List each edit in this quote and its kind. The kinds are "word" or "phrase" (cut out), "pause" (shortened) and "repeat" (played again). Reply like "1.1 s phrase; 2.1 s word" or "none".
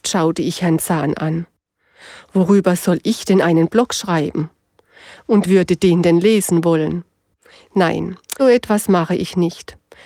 5.4 s word; 8.4 s word